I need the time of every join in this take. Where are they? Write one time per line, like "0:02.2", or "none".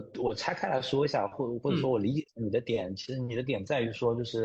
0:02.3